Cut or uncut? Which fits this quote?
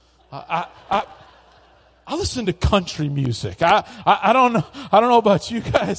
uncut